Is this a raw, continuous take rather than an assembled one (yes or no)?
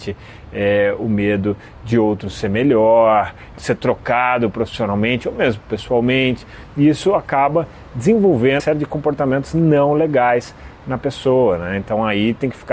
no